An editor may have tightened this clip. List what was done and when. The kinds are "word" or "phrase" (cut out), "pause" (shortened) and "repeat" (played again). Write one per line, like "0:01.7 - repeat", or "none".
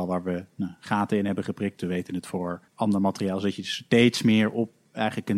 0:02.7 - pause